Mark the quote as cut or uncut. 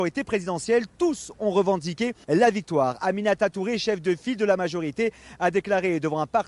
cut